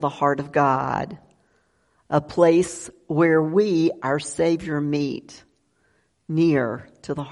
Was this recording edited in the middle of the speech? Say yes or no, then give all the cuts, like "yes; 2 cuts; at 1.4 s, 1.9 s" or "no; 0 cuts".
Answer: no; 0 cuts